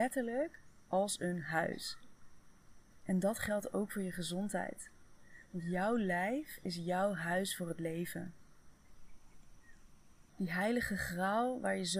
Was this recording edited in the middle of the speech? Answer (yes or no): no